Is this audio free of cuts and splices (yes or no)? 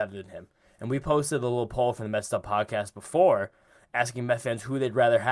yes